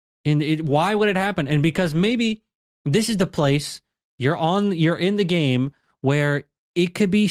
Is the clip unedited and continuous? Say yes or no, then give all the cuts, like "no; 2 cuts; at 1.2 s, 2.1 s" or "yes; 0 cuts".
yes; 0 cuts